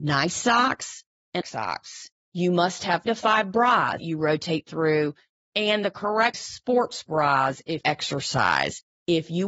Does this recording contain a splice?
yes; 5 cuts; at 1.4 s, 3.1 s, 4.0 s, 6.3 s, 7.8 s

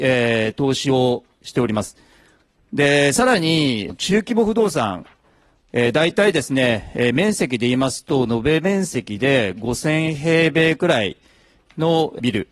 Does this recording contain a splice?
no; 0 cuts

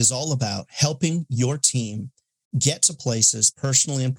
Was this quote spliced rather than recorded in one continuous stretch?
no; 0 cuts

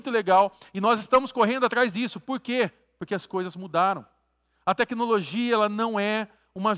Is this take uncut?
yes; 0 cuts

